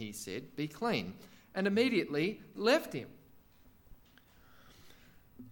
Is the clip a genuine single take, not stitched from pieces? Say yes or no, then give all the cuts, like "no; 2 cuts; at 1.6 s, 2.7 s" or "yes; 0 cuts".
no; 1 cut; at 2.6 s